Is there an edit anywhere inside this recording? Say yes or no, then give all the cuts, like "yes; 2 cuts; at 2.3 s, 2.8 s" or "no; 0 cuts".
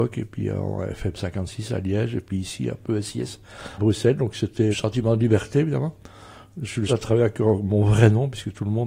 yes; 3 cuts; at 3.8 s, 4.7 s, 6.9 s